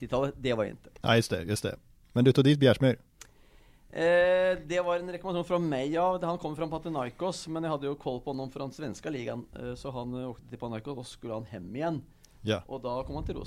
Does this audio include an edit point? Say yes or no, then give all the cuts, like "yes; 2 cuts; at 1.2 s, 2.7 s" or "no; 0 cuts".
no; 0 cuts